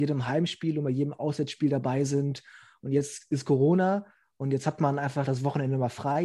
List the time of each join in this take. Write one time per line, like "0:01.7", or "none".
none

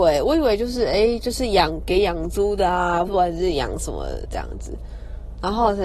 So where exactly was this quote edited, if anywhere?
0:03.1

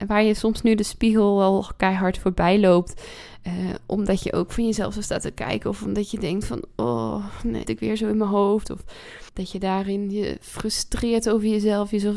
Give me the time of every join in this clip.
0:07.6
0:09.3

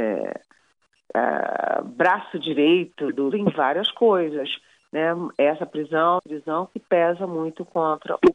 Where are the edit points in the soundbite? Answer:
0:03.3
0:06.2

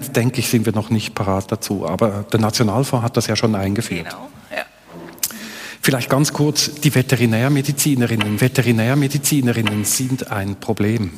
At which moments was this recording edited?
0:08.4

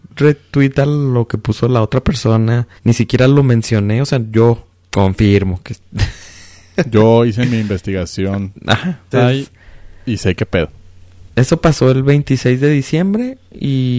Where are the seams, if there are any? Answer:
0:02.8
0:09.1
0:11.3

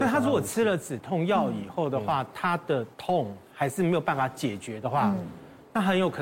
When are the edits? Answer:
0:02.9

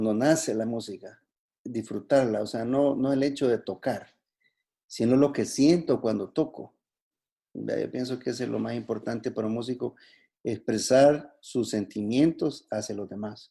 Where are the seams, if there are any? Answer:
none

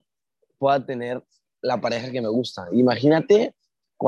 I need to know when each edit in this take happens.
none

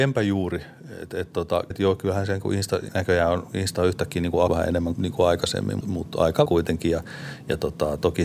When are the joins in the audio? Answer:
0:01.7
0:02.9
0:04.5
0:04.9
0:05.8
0:06.5

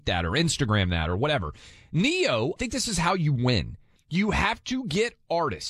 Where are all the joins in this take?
0:02.6
0:04.0

